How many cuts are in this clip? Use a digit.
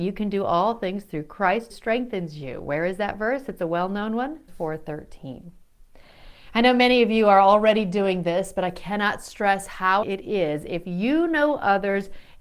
3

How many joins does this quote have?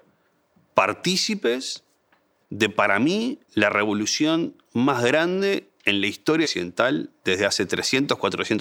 2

